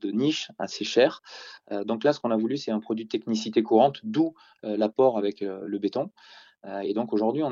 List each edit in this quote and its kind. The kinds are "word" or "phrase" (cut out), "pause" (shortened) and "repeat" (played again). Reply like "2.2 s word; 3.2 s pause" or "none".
none